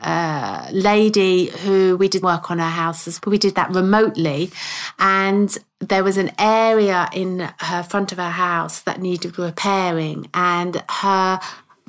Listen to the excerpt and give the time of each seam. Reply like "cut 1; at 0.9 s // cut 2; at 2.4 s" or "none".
cut 1; at 2.2 s // cut 2; at 3.2 s